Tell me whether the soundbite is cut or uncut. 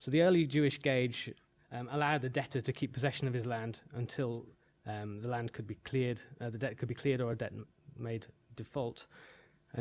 uncut